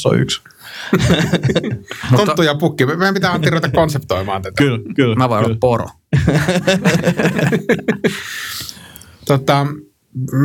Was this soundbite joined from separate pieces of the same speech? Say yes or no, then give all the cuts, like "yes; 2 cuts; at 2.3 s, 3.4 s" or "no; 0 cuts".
no; 0 cuts